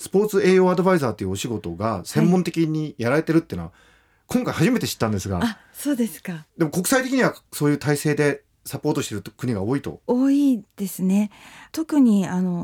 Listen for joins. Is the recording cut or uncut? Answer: uncut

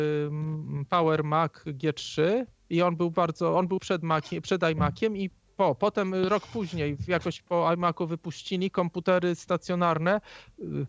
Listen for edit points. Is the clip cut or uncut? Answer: uncut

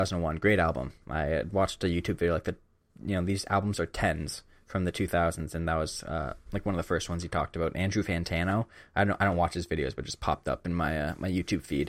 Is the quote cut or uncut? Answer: uncut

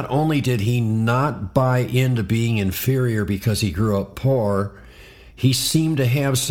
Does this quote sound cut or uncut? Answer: uncut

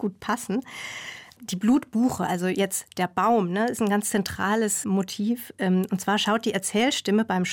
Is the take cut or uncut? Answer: cut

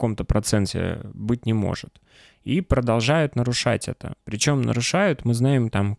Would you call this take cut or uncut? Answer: uncut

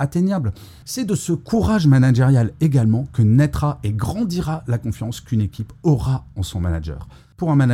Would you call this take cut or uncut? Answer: uncut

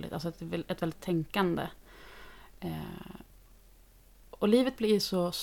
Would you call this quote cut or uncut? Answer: cut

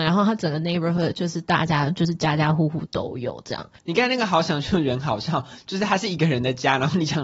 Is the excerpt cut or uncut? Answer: cut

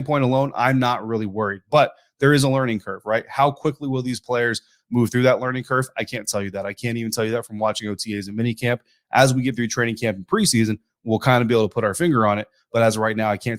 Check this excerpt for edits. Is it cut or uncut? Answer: uncut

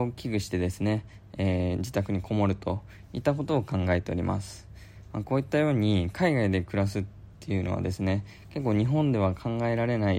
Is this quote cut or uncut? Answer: uncut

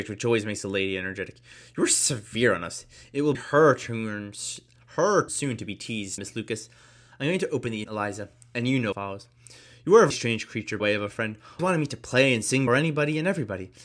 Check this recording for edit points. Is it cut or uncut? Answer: cut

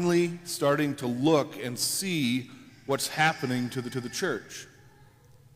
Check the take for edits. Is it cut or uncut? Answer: cut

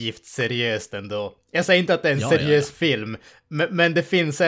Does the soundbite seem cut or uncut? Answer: uncut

